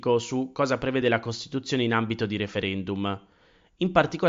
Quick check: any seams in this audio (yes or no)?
no